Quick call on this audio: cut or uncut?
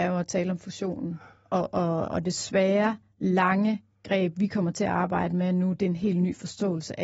uncut